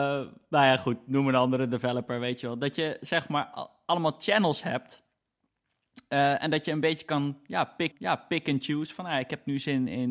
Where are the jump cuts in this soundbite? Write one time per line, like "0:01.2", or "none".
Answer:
0:07.9